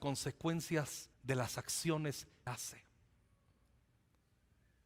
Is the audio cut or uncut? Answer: cut